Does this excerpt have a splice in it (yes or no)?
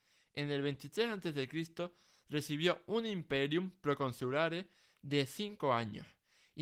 no